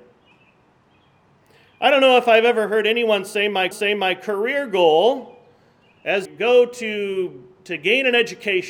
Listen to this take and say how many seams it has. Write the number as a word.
two